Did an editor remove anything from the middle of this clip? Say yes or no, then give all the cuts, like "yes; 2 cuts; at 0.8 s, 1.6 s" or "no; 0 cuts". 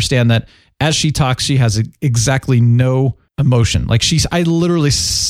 yes; 1 cut; at 3.3 s